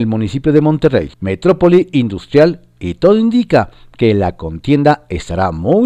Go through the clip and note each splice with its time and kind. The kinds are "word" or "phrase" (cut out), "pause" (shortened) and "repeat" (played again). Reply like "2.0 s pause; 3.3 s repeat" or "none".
1.1 s pause